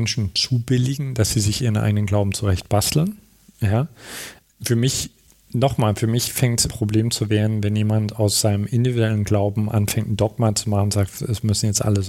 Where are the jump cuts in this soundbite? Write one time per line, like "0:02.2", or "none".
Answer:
0:06.7